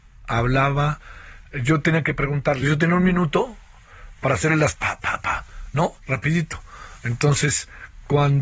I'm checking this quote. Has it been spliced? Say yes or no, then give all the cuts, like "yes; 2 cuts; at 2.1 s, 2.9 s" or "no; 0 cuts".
yes; 3 cuts; at 2.6 s, 4.7 s, 6.0 s